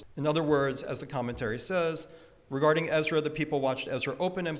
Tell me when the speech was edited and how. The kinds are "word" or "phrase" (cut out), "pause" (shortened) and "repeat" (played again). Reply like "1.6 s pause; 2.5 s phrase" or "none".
none